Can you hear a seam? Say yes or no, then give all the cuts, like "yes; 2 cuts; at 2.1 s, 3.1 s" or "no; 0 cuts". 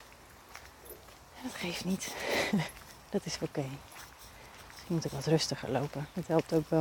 no; 0 cuts